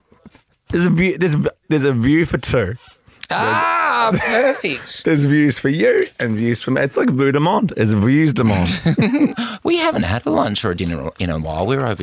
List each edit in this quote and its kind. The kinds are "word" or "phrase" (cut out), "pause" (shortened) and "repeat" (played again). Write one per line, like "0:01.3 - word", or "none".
none